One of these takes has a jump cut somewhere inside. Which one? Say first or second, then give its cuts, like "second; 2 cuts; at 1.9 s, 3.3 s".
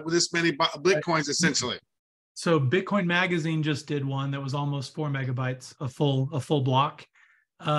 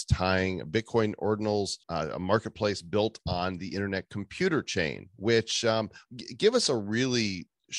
second; 1 cut; at 1.8 s